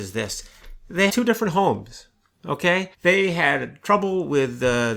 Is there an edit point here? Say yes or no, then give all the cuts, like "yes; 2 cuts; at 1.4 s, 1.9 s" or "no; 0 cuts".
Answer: yes; 2 cuts; at 1.1 s, 2.9 s